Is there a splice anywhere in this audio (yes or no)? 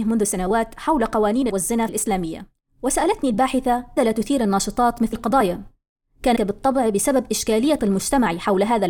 yes